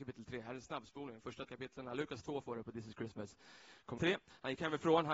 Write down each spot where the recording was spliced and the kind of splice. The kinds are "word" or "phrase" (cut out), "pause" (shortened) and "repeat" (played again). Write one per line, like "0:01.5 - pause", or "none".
0:01.5 - word
0:04.0 - word